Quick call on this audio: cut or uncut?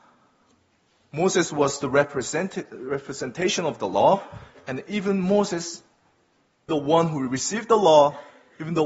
cut